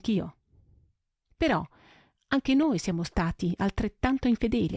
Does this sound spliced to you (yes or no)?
no